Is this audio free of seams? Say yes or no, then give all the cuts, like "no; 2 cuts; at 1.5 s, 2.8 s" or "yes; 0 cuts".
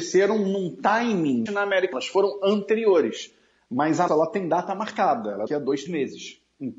no; 5 cuts; at 1.5 s, 1.9 s, 4.1 s, 5.5 s, 5.9 s